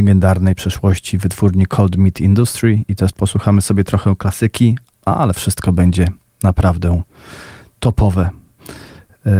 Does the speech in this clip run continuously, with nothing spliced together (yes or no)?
yes